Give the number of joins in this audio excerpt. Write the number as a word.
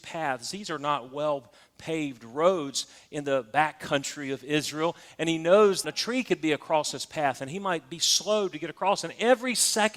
one